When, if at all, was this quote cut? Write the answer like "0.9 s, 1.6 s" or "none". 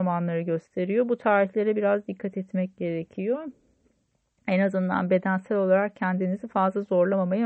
none